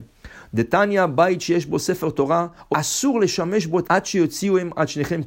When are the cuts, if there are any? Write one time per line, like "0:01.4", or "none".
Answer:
0:02.7
0:03.8